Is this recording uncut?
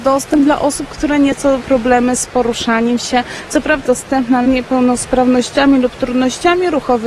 no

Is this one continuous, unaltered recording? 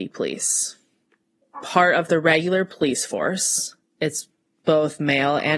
yes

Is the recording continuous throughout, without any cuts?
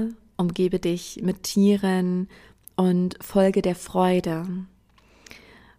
yes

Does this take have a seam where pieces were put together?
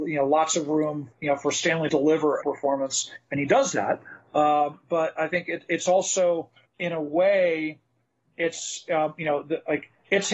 yes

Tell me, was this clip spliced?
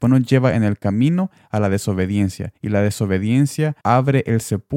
yes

